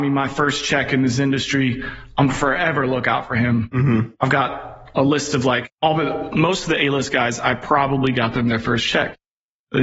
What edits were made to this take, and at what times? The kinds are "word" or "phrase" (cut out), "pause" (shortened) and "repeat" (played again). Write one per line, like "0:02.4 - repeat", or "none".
0:05.7 - pause